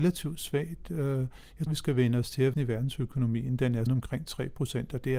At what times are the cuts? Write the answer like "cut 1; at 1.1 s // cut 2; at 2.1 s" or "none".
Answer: cut 1; at 1.7 s // cut 2; at 2.5 s // cut 3; at 3.9 s

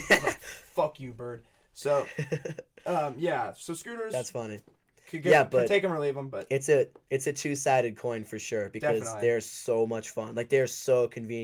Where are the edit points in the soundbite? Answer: none

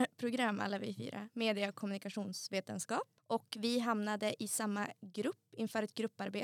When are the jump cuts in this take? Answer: cut 1; at 3.2 s

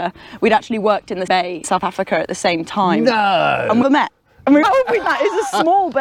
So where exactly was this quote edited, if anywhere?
cut 1; at 1.3 s // cut 2; at 1.6 s // cut 3; at 3.8 s // cut 4; at 4.6 s // cut 5; at 5.0 s

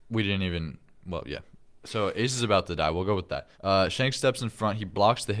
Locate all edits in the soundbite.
cut 1; at 3.5 s

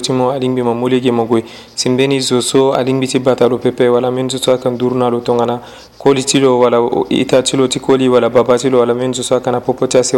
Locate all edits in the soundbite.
none

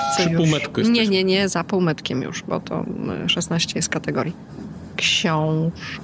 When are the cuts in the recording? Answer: none

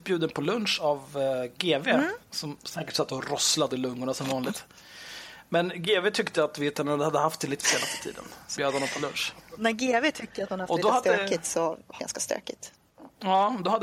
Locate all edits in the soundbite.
cut 1; at 2.2 s // cut 2; at 3.7 s // cut 3; at 7.6 s // cut 4; at 8.6 s // cut 5; at 12.0 s

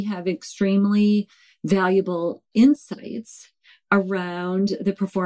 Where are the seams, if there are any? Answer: none

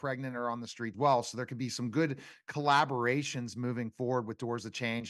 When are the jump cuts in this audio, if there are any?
cut 1; at 0.9 s

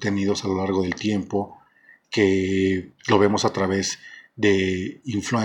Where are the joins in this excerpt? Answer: none

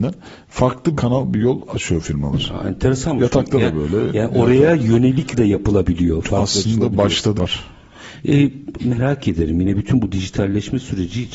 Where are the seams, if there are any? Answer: cut 1; at 0.9 s // cut 2; at 5.3 s // cut 3; at 7.4 s // cut 4; at 8.8 s

